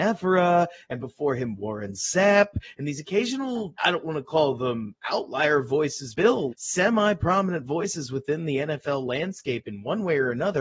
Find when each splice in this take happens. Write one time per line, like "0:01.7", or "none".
0:03.8
0:06.1
0:06.5